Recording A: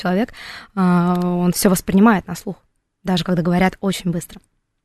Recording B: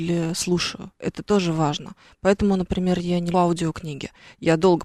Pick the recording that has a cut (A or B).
B